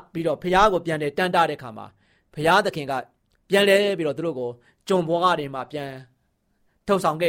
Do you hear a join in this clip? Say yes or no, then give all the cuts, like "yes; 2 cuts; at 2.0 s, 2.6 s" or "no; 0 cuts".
no; 0 cuts